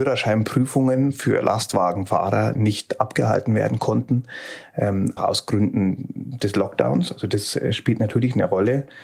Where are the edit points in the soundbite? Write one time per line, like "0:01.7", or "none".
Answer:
0:05.2